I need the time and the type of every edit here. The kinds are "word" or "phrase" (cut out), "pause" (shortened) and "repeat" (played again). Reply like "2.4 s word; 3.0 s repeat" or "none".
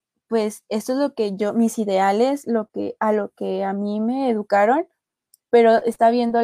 none